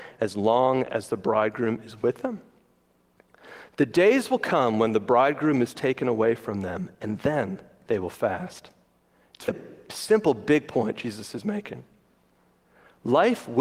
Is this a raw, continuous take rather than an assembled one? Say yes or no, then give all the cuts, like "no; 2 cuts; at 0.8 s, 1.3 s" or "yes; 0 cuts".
no; 1 cut; at 9.5 s